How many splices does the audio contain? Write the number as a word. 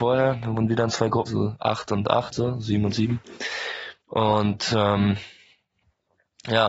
three